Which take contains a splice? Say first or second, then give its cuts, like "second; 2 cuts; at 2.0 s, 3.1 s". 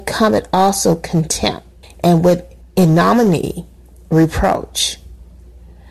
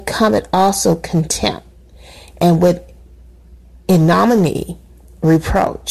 first; 2 cuts; at 1.8 s, 2.6 s